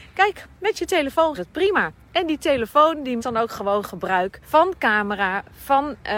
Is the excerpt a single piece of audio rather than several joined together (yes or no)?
no